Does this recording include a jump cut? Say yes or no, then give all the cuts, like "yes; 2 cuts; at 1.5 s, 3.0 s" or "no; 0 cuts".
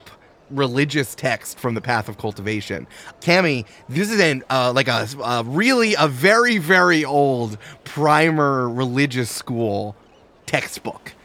no; 0 cuts